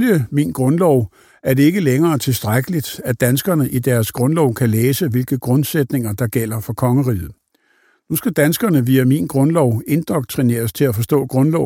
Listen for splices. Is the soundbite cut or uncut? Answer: uncut